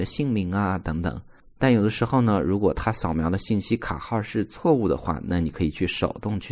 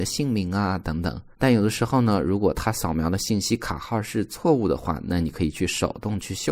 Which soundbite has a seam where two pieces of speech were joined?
second; 1 cut; at 1.3 s

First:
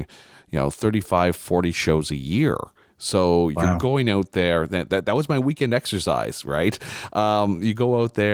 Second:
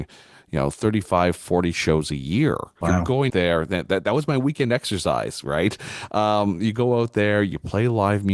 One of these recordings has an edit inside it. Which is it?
second; 2 cuts; at 2.8 s, 3.3 s

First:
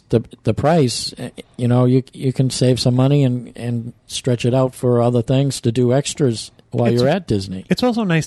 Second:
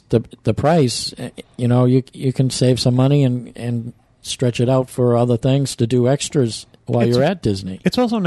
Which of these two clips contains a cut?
first; 1 cut; at 4.0 s

